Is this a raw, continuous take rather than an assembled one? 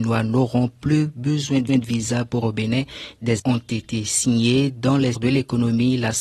no; 4 cuts; at 1.7 s, 2.4 s, 3.4 s, 5.1 s

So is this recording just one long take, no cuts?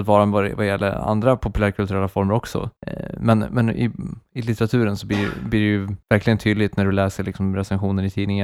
no; 2 cuts; at 2.8 s, 6.0 s

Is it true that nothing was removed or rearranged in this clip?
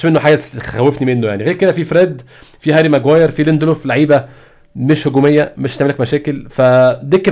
yes; 0 cuts

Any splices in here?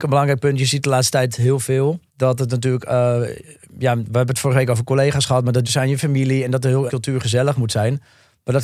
yes; 3 cuts; at 2.1 s, 5.6 s, 6.9 s

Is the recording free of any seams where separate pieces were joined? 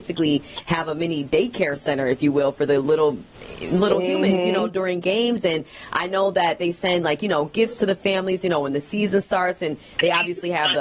yes; 0 cuts

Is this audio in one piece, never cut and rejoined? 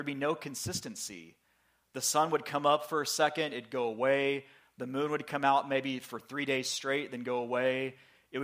yes; 0 cuts

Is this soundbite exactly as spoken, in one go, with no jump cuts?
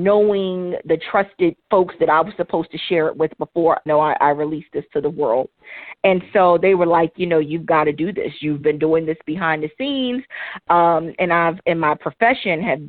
no; 3 cuts; at 1.6 s, 3.9 s, 8.6 s

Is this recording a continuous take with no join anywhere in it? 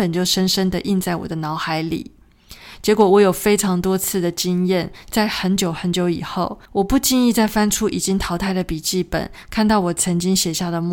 no; 1 cut; at 6.7 s

